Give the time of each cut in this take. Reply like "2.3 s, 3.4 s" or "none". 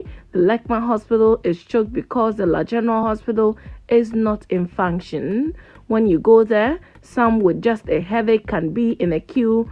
none